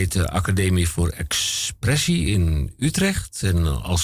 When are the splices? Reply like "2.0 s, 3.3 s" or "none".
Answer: none